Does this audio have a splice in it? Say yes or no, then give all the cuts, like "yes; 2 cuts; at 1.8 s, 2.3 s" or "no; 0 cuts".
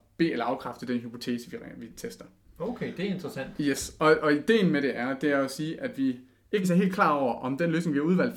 yes; 2 cuts; at 1.9 s, 6.6 s